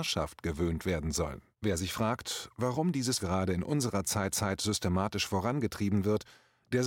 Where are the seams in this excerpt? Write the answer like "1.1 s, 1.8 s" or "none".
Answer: 1.5 s, 3.2 s, 4.3 s